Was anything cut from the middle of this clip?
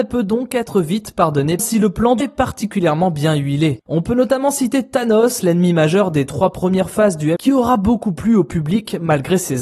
yes; 3 cuts; at 1.6 s, 2.2 s, 7.4 s

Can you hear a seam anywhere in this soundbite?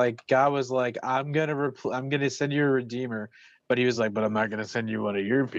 no; 0 cuts

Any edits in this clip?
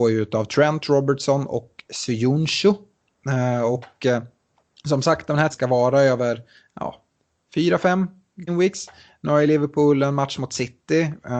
yes; 2 cuts; at 5.5 s, 8.5 s

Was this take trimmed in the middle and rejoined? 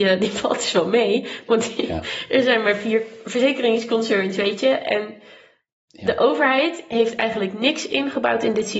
no; 0 cuts

